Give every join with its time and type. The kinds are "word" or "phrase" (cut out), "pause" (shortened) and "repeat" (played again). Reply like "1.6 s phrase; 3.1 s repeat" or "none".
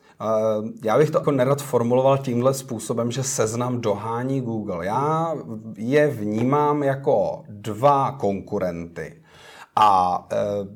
1.2 s phrase